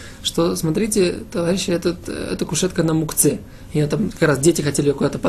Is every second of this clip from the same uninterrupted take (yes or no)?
yes